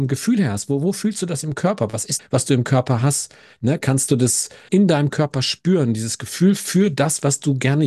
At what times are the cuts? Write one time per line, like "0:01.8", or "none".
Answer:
0:02.2
0:04.7